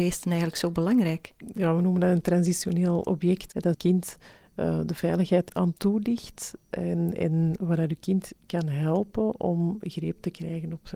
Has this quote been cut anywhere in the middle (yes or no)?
yes